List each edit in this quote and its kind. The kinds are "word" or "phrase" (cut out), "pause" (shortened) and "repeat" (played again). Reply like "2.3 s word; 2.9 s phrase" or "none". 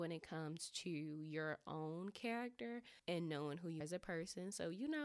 3.0 s pause; 3.8 s word